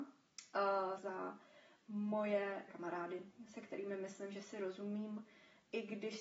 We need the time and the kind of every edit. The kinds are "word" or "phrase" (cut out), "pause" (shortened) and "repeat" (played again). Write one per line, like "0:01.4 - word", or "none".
0:01.0 - word
0:02.7 - word